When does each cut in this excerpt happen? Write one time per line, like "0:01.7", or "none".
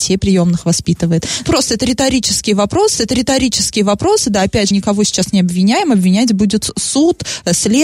0:01.4
0:03.0
0:04.7